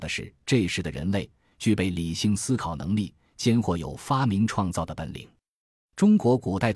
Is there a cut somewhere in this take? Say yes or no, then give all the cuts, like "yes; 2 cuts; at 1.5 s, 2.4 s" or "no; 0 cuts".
no; 0 cuts